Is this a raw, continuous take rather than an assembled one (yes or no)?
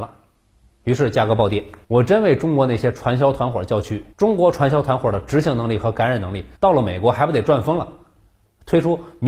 no